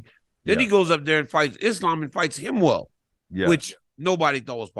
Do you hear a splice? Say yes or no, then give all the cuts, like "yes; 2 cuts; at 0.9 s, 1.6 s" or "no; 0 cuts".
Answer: no; 0 cuts